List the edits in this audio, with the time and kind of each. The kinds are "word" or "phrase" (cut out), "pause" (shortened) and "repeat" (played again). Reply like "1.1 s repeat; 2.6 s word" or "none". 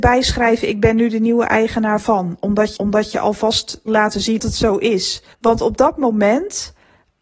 2.8 s repeat; 3.9 s word; 4.4 s word; 5.3 s pause